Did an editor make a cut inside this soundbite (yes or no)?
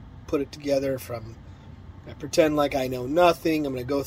no